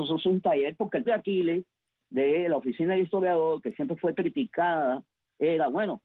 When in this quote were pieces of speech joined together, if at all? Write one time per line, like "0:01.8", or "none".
0:01.1